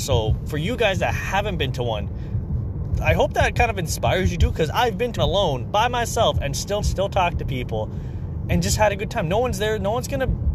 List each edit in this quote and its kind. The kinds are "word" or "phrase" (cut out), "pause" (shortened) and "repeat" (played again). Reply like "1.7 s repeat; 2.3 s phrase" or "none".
5.2 s word; 6.8 s phrase